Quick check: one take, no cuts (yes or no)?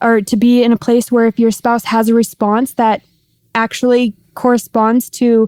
yes